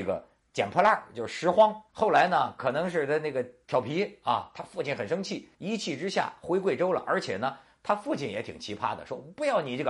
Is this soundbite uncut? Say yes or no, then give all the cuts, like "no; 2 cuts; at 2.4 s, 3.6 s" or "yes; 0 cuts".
no; 2 cuts; at 1.9 s, 5.5 s